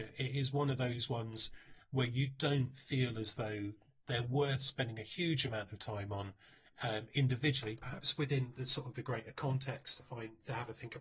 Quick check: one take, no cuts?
yes; 0 cuts

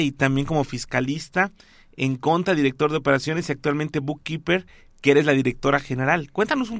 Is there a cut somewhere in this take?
no; 0 cuts

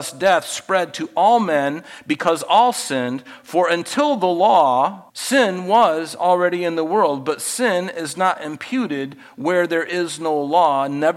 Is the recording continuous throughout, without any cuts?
no; 1 cut; at 5.1 s

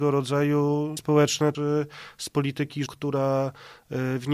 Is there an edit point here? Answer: yes; 3 cuts; at 1.0 s, 1.5 s, 2.9 s

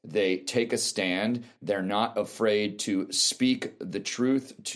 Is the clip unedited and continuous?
yes; 0 cuts

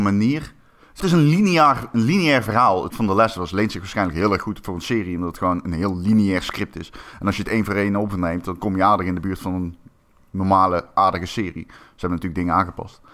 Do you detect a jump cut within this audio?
yes; 2 cuts; at 1.0 s, 2.9 s

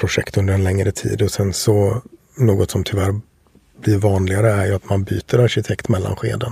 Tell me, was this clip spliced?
no; 0 cuts

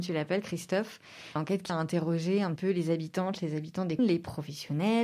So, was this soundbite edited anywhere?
yes; 4 cuts; at 1.4 s, 1.7 s, 2.6 s, 4.0 s

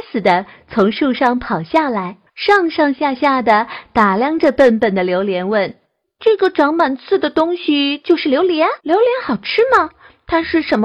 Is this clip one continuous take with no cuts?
no; 3 cuts; at 2.3 s, 5.8 s, 8.8 s

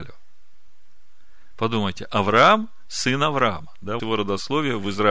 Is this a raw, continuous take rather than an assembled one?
no; 1 cut; at 4.0 s

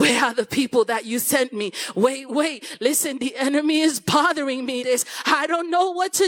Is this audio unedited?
no; 2 cuts; at 2.3 s, 4.8 s

